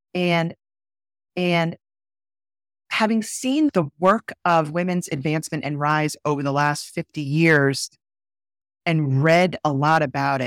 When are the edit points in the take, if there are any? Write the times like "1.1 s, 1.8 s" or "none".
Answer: 1.3 s